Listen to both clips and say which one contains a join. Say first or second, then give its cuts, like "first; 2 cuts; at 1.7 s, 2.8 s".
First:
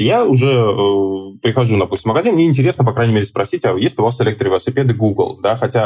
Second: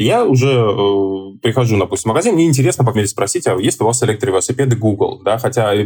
second; 1 cut; at 2.9 s